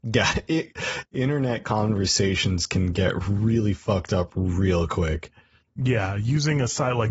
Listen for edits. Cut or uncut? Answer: uncut